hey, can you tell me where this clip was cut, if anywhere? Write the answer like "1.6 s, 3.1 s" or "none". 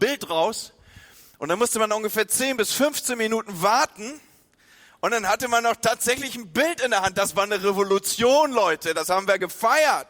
none